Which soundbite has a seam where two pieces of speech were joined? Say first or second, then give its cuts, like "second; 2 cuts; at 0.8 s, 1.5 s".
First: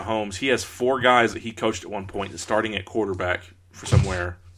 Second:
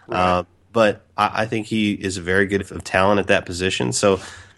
second; 1 cut; at 2.6 s